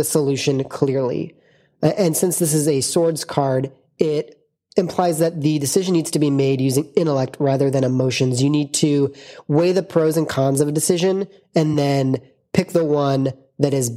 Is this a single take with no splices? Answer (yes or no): yes